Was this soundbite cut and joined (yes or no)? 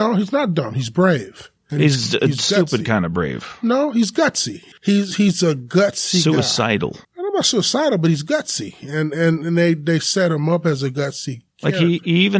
yes